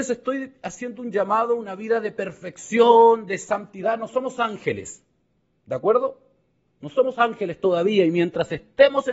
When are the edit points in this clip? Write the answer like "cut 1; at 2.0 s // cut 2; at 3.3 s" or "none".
none